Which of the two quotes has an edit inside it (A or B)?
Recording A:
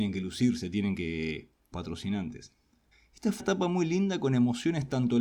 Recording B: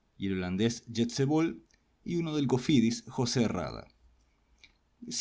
A